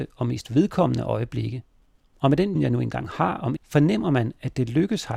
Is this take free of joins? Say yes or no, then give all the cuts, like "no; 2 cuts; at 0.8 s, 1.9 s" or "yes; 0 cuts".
no; 2 cuts; at 2.6 s, 3.6 s